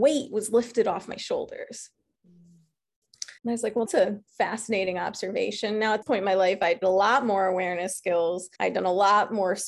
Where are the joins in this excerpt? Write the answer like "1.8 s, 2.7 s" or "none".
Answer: 3.4 s, 3.9 s, 4.3 s, 6.0 s, 6.8 s, 8.6 s